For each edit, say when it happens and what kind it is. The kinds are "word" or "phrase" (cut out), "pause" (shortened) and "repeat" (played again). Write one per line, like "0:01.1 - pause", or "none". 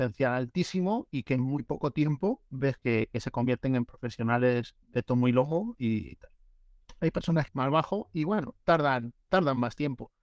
0:02.8 - word
0:04.8 - pause
0:07.5 - phrase